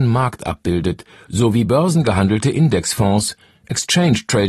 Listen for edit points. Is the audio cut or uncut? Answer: uncut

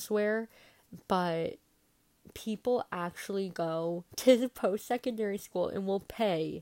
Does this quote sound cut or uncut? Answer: cut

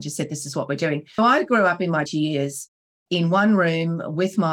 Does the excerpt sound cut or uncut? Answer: cut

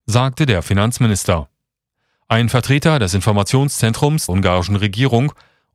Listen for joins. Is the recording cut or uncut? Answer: cut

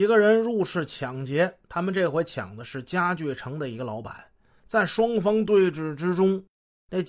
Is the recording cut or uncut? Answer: uncut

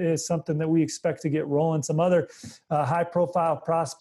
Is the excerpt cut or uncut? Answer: uncut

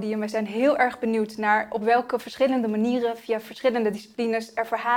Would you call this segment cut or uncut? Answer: uncut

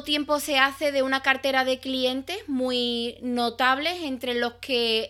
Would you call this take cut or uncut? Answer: uncut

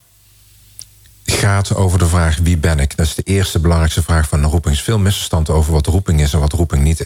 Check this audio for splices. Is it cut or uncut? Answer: uncut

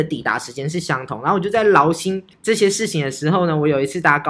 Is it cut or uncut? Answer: cut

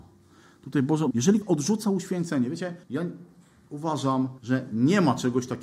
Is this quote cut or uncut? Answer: cut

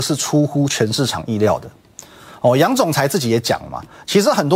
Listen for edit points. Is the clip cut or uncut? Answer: uncut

